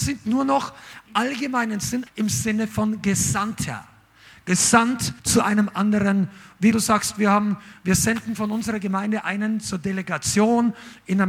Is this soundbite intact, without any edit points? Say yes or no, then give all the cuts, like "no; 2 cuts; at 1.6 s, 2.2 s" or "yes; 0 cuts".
no; 4 cuts; at 1.1 s, 2.1 s, 5.2 s, 6.7 s